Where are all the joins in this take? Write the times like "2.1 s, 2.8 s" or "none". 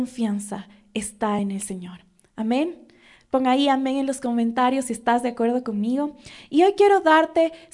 none